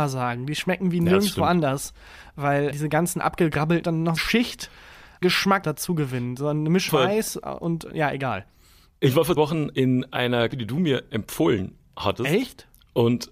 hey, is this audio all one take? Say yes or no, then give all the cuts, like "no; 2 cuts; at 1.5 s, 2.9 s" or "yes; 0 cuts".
no; 9 cuts; at 2.7 s, 3.8 s, 4.2 s, 5.2 s, 5.6 s, 6.9 s, 9.4 s, 9.7 s, 10.5 s